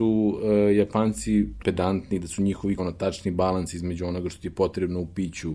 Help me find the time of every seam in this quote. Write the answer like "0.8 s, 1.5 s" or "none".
1.6 s, 2.8 s